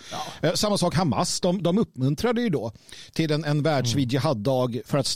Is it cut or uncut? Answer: uncut